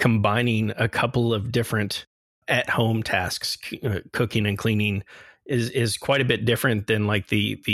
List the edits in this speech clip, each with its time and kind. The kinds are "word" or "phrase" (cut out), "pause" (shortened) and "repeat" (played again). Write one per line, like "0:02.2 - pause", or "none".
none